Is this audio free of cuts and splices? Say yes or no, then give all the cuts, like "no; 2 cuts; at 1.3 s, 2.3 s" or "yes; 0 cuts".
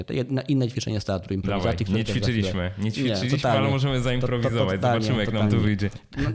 yes; 0 cuts